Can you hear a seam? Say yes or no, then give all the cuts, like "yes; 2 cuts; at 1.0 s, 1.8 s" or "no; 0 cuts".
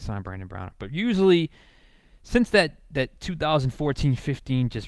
no; 0 cuts